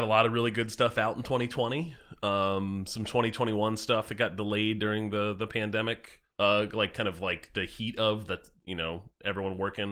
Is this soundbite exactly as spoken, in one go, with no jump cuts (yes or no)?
no